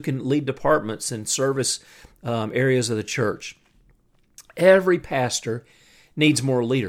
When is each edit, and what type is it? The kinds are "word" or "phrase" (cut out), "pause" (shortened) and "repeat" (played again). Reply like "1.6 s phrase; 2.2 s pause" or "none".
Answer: none